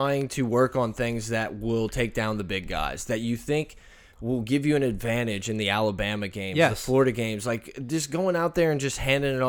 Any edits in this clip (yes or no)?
no